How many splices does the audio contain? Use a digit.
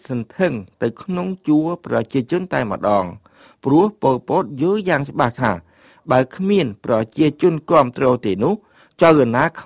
0